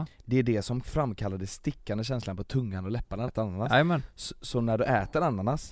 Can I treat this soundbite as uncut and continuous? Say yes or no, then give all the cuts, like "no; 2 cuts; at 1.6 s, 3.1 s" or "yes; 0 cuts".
no; 1 cut; at 3.3 s